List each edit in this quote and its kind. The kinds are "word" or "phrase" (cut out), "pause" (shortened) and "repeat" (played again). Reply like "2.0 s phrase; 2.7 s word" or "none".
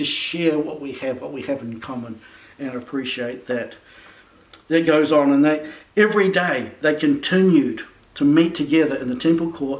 none

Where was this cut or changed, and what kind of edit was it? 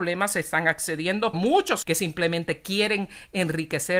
1.3 s word; 1.8 s word

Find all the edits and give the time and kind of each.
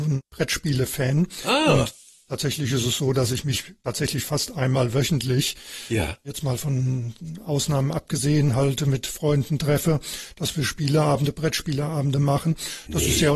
none

